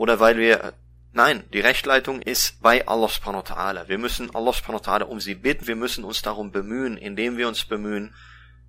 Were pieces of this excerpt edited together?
yes; 2 cuts; at 2.2 s, 5.6 s

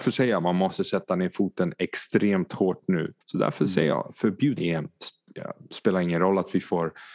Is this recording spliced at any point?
yes; 2 cuts; at 3.2 s, 4.6 s

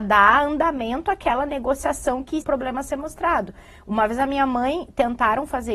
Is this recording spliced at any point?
yes; 1 cut; at 2.4 s

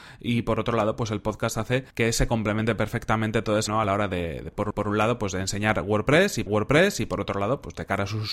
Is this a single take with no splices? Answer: no; 4 cuts; at 1.9 s, 3.7 s, 4.7 s, 6.5 s

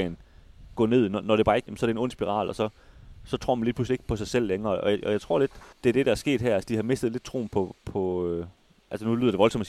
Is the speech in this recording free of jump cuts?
no; 2 cuts; at 1.7 s, 5.7 s

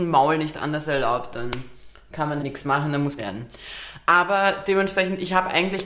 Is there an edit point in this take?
yes; 2 cuts; at 2.4 s, 3.2 s

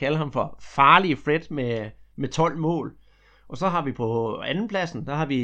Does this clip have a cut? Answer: no; 0 cuts

